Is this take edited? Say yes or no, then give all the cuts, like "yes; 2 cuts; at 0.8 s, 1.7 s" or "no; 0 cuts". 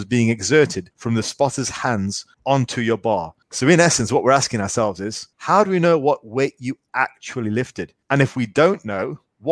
yes; 5 cuts; at 0.9 s, 2.3 s, 3.4 s, 5.3 s, 8.0 s